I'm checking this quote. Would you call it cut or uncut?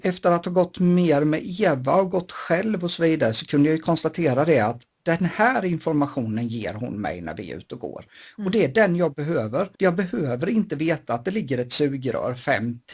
cut